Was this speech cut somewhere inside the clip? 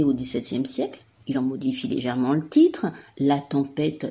no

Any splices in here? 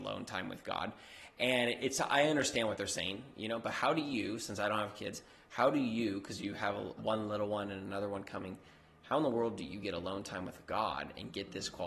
yes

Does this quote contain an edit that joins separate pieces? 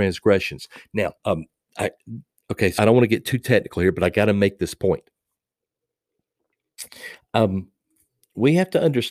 yes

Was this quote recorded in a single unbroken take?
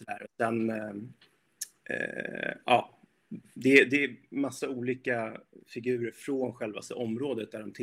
yes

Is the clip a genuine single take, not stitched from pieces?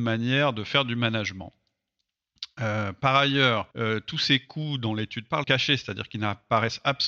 no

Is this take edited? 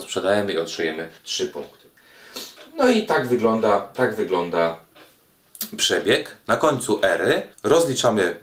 yes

